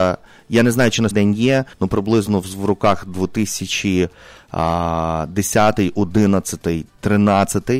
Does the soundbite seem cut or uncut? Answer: cut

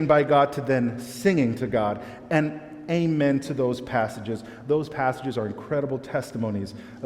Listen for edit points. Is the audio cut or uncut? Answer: uncut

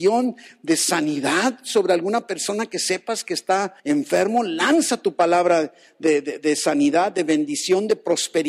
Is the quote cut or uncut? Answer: cut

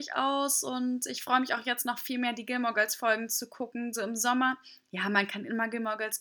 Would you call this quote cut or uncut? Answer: uncut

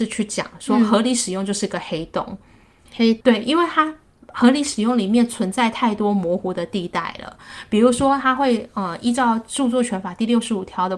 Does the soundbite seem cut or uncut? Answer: cut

